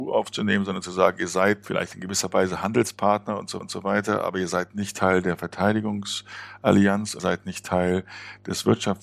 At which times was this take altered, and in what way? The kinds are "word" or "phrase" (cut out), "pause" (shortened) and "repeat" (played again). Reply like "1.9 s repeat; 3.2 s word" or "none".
3.6 s repeat; 7.2 s word